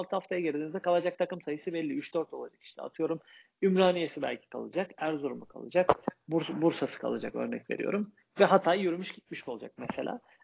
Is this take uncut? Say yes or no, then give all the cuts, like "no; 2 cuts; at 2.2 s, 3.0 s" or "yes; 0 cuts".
yes; 0 cuts